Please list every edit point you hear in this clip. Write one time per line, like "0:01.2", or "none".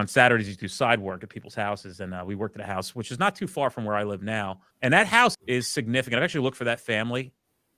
0:04.7
0:05.3